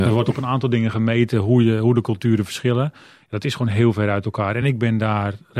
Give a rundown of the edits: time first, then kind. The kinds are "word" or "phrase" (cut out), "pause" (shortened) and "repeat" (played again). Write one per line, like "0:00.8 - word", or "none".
none